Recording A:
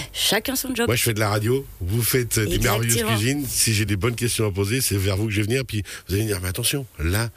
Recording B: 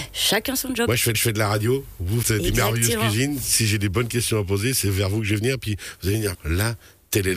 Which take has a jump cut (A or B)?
B